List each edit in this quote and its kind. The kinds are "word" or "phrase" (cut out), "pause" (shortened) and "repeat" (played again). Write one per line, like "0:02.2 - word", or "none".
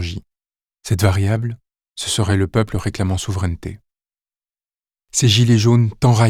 none

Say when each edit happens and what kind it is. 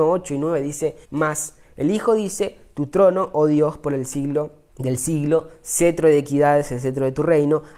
0:01.0 - pause
0:04.7 - pause

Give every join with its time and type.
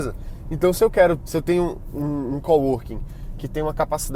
0:01.2 - word

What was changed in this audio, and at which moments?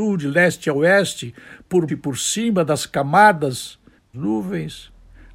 0:01.9 - word
0:04.1 - phrase

